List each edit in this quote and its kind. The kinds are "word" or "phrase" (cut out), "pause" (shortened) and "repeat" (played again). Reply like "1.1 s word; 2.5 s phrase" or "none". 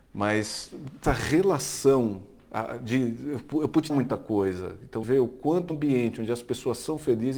1.0 s word; 3.9 s word; 5.0 s word; 5.7 s word

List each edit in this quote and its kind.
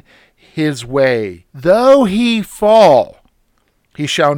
1.5 s pause

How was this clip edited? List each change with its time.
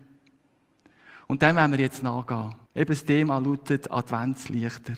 2.6 s pause

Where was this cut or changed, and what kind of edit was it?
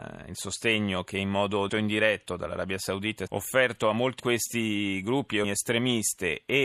1.7 s word; 3.3 s word; 4.2 s word; 5.4 s word

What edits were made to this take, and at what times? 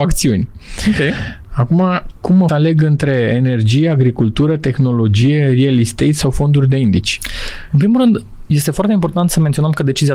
2.5 s phrase

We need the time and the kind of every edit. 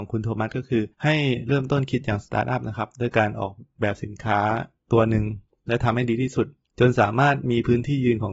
0.9 s pause

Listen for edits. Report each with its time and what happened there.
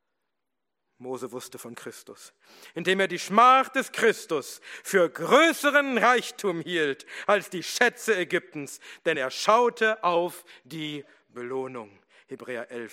none

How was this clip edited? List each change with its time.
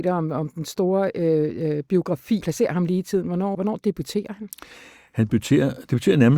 2.4 s phrase; 3.5 s word

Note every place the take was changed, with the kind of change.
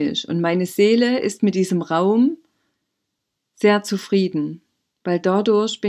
none

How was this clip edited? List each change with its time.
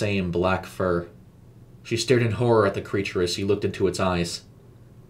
1.8 s pause

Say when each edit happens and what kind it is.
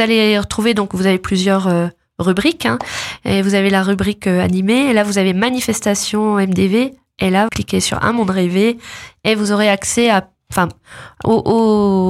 7.5 s word

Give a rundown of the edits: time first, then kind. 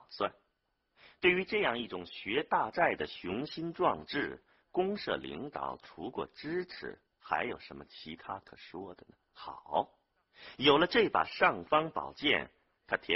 7.1 s pause; 9.2 s pause

